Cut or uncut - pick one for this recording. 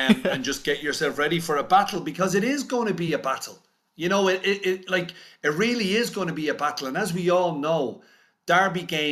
uncut